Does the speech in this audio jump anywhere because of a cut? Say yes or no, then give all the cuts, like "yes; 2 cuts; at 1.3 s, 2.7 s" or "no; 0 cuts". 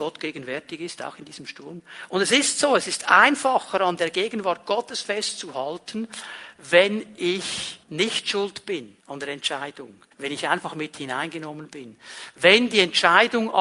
yes; 3 cuts; at 7.8 s, 9.0 s, 10.1 s